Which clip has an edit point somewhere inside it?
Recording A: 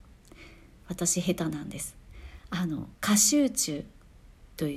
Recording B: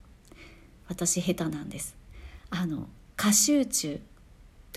A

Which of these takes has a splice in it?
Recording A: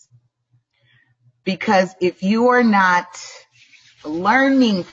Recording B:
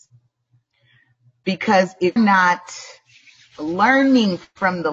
B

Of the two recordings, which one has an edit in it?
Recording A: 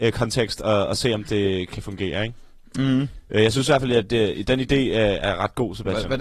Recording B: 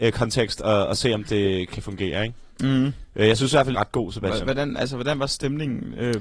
B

